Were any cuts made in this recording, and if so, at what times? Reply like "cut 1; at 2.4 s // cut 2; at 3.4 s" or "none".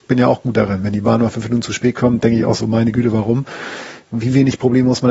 none